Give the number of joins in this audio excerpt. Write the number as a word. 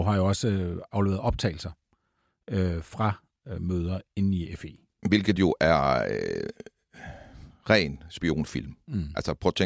zero